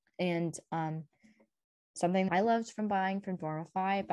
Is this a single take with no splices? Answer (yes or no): no